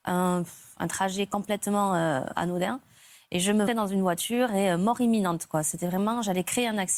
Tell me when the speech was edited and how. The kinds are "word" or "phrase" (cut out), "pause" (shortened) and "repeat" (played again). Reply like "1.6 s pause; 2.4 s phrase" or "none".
3.7 s phrase